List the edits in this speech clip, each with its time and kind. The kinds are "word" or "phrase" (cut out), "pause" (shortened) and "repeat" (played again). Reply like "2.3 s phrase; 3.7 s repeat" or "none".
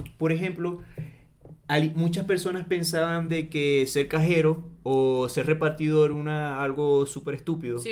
none